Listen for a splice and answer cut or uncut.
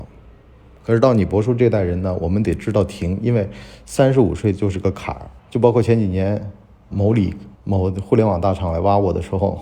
cut